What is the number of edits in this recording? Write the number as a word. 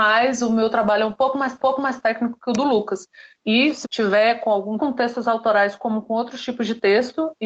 four